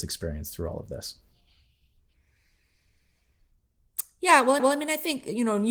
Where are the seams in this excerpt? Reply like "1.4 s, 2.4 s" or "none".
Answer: 4.6 s